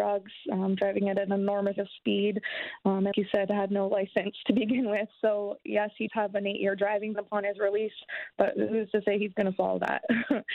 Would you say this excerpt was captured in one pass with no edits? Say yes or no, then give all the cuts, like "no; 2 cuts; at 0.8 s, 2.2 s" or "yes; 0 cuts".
no; 4 cuts; at 1.8 s, 3.1 s, 6.1 s, 7.1 s